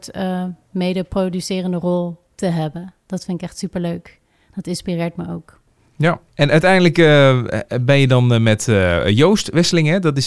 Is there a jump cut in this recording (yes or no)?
yes